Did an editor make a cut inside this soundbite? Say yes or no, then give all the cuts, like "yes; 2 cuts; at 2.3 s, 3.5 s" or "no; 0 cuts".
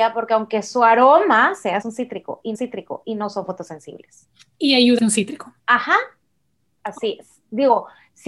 yes; 4 cuts; at 1.8 s, 2.5 s, 5.0 s, 5.6 s